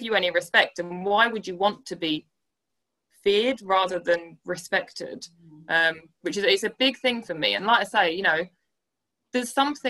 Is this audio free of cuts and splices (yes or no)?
yes